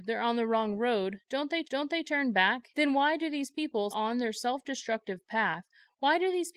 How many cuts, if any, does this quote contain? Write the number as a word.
three